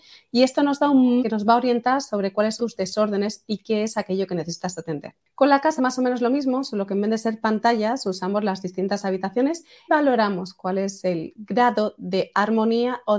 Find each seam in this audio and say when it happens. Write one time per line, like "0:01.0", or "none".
0:01.2
0:02.6
0:05.8
0:09.9

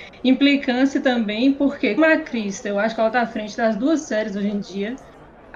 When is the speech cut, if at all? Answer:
0:02.0

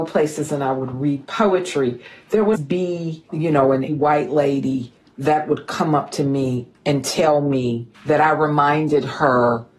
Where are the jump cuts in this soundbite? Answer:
0:02.5
0:03.9
0:06.7
0:07.9

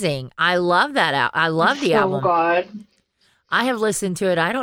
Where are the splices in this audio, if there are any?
none

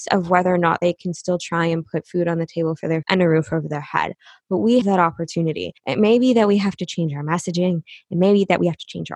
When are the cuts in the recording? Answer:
0:03.0
0:04.8
0:05.8

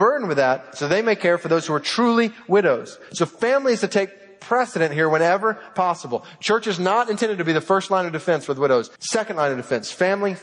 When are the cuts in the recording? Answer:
0:08.9

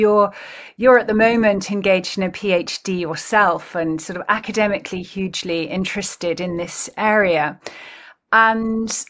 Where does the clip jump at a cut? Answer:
none

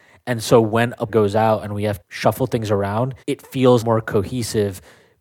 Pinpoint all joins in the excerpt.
0:01.1
0:02.0
0:03.2
0:03.8

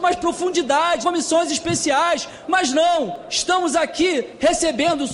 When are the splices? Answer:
0:01.0

